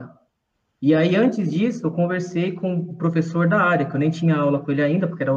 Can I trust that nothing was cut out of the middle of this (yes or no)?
yes